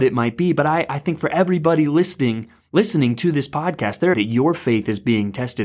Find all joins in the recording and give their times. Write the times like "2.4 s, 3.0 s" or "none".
4.1 s